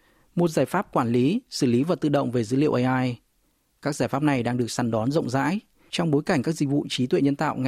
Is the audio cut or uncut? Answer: uncut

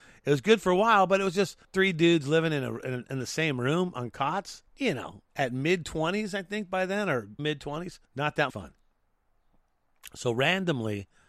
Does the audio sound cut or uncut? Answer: cut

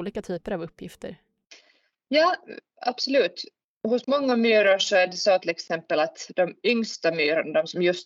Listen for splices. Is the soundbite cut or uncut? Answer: uncut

